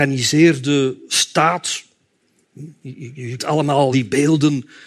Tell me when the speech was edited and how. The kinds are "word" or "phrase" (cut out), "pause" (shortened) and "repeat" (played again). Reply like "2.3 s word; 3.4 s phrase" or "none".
3.4 s word; 3.9 s word